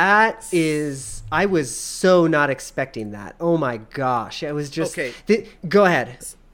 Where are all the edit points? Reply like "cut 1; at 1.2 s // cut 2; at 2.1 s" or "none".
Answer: cut 1; at 5.6 s